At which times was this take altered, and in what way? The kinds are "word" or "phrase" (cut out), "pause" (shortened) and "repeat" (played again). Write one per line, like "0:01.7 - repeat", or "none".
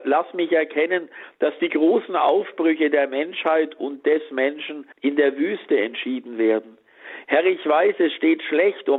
0:04.9 - pause